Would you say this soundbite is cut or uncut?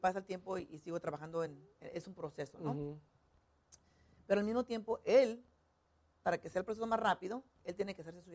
uncut